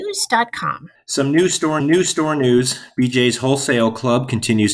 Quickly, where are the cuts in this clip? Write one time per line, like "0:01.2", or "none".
0:00.9
0:01.8